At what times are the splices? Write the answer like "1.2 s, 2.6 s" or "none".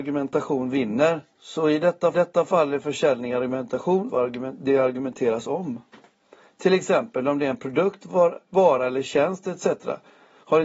1.3 s, 2.1 s, 4.1 s